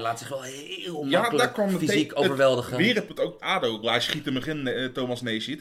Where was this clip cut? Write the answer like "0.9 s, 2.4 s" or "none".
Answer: 3.1 s, 3.4 s, 3.8 s, 4.4 s